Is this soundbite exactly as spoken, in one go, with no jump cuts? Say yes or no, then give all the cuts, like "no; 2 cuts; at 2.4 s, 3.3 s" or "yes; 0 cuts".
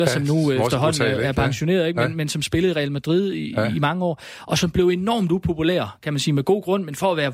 yes; 0 cuts